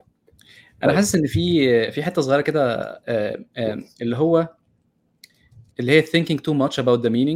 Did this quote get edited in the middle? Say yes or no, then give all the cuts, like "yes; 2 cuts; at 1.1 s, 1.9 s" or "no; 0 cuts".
yes; 1 cut; at 5.7 s